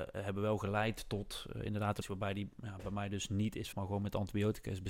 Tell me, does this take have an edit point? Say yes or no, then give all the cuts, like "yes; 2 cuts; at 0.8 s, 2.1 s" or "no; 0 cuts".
yes; 2 cuts; at 2.0 s, 3.7 s